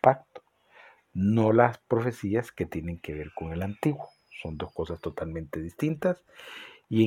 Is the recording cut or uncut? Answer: uncut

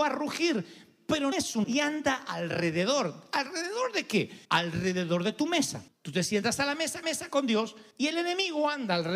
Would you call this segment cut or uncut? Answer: cut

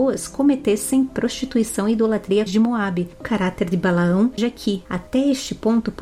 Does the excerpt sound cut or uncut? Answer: cut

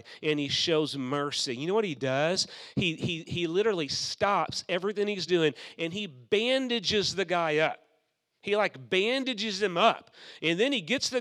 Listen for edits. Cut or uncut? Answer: uncut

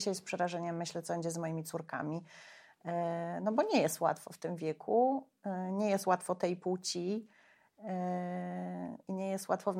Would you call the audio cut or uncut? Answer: uncut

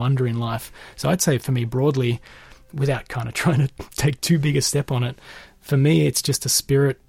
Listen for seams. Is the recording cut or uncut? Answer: uncut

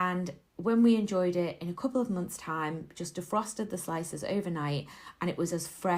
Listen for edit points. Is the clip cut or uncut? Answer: uncut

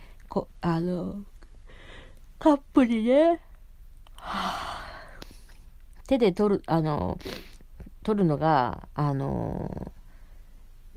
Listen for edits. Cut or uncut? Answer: uncut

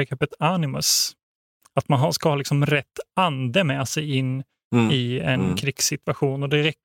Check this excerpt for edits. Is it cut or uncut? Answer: uncut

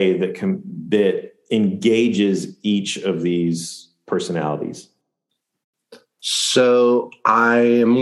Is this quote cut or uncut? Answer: uncut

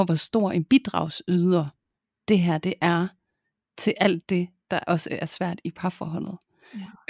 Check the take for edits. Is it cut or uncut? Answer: uncut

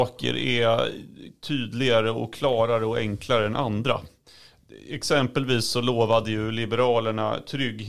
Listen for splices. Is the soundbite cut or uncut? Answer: uncut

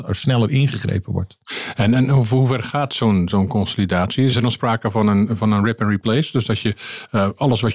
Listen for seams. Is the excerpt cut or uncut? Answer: uncut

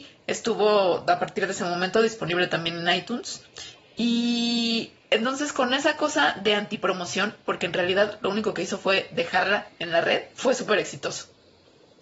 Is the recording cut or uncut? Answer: cut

